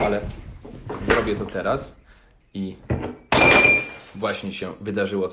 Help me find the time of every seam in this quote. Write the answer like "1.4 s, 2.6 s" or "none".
none

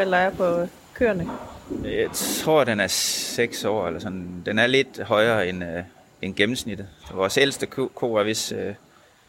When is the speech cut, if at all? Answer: none

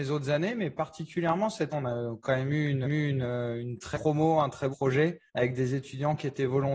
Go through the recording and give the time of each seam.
1.7 s, 2.8 s, 3.9 s, 4.7 s, 5.3 s

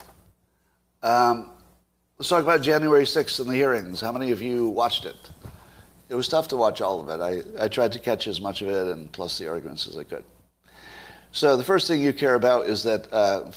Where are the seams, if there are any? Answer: none

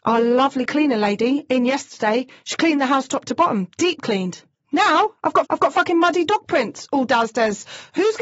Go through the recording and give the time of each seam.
5.4 s

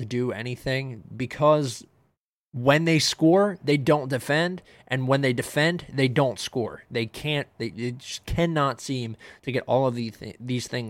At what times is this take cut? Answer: none

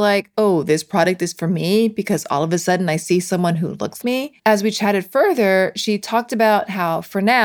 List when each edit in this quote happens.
4.0 s, 4.4 s

